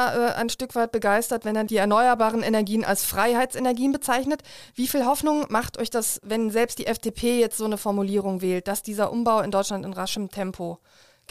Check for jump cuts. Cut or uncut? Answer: uncut